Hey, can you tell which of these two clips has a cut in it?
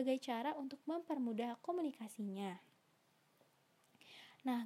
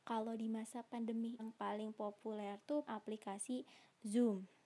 second; 2 cuts; at 1.4 s, 2.9 s

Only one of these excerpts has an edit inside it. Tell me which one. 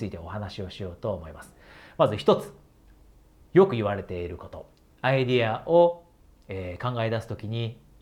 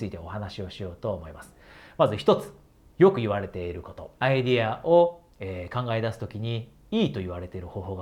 second; 3 cuts; at 2.8 s, 4.2 s, 5.3 s

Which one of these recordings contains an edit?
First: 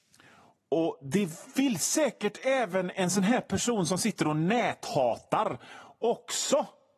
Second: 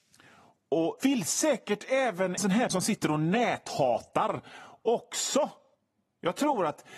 second; 4 cuts; at 1.0 s, 2.4 s, 2.7 s, 5.7 s

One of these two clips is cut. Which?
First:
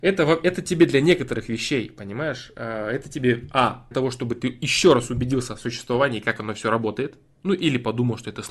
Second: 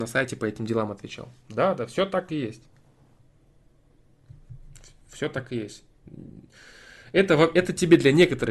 first; 1 cut; at 3.9 s

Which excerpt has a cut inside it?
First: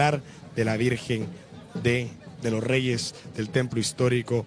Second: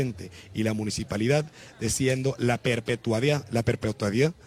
first; 1 cut; at 2.4 s

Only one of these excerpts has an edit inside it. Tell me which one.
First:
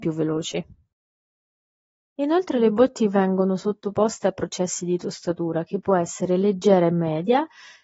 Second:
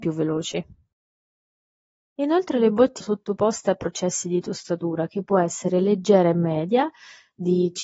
second; 1 cut; at 3.0 s

